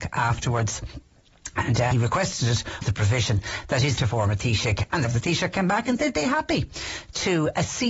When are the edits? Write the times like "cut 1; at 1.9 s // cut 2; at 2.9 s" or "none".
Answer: cut 1; at 1.9 s // cut 2; at 2.8 s // cut 3; at 4.0 s // cut 4; at 5.0 s // cut 5; at 6.0 s